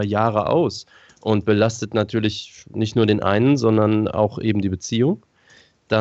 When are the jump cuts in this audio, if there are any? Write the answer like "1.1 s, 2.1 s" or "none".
2.6 s